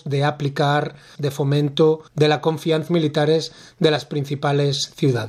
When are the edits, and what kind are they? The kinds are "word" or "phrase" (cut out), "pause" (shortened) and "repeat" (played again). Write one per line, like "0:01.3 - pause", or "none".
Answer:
0:01.2 - word
0:02.1 - pause
0:02.9 - phrase